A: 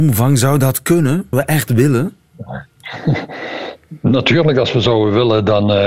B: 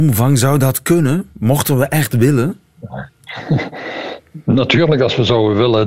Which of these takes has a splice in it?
A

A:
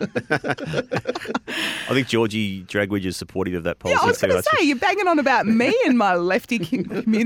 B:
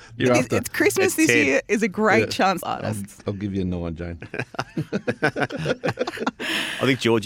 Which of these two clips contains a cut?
B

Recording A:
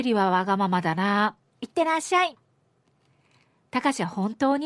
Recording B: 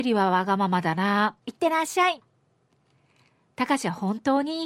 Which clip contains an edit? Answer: B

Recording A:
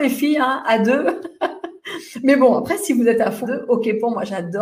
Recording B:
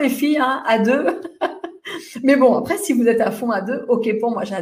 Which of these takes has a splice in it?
A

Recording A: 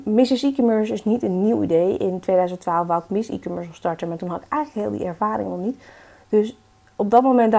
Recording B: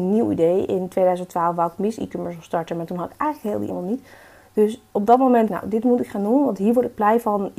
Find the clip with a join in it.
B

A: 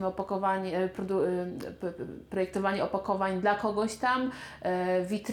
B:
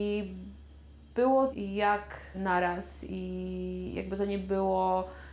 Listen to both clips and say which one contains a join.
B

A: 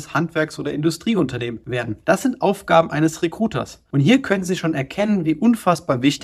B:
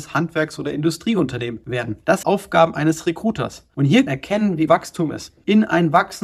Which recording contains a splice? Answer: B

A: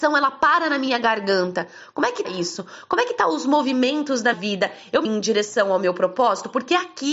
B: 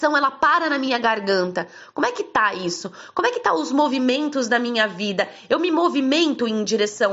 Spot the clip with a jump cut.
A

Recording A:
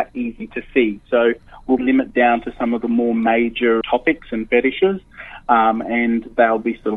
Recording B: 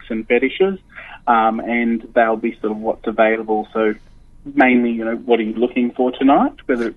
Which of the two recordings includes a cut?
A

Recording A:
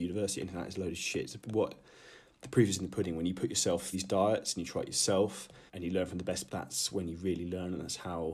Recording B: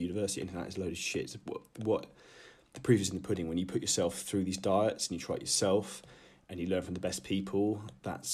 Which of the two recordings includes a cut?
A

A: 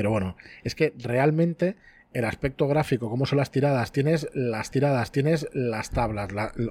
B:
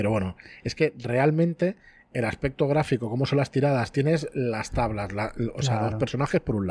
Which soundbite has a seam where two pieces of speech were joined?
A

